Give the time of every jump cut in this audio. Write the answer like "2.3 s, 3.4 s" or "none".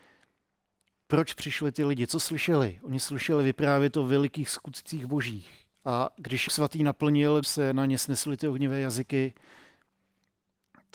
5.7 s, 6.5 s, 7.4 s